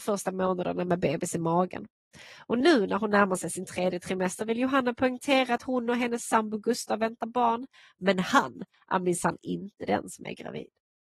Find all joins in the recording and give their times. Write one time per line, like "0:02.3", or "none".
none